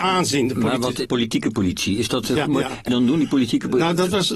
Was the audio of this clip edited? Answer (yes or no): yes